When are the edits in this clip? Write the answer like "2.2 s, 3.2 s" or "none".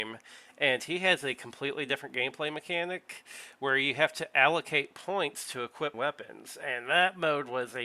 5.9 s